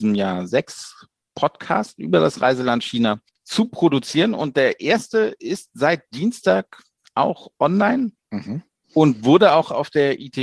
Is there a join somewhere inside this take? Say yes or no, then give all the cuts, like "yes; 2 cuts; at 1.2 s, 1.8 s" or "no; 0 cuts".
no; 0 cuts